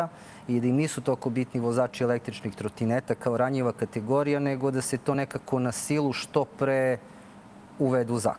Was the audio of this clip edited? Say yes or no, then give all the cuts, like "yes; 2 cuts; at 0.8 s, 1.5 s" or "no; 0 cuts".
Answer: no; 0 cuts